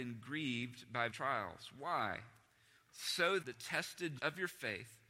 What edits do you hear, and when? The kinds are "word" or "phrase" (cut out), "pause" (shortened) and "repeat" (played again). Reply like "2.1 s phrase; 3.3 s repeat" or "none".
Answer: 1.1 s word; 3.4 s word; 4.2 s word